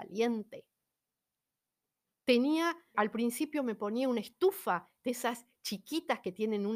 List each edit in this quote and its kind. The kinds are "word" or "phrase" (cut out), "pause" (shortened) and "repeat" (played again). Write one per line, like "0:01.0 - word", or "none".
0:02.9 - word